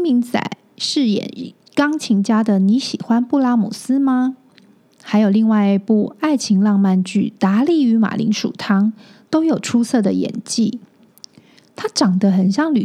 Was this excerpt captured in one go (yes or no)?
yes